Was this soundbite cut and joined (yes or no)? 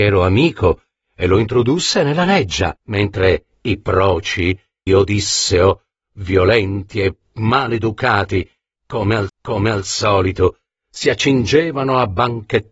yes